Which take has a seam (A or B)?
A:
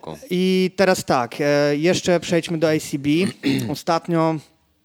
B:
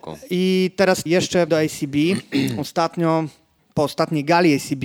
B